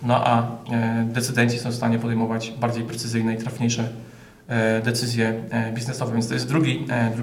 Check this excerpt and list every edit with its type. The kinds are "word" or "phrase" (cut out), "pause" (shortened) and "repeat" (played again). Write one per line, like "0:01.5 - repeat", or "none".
none